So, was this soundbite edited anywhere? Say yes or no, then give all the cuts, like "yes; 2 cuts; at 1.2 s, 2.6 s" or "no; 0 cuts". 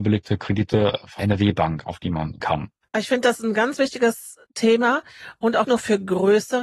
yes; 4 cuts; at 1.2 s, 2.4 s, 2.8 s, 5.6 s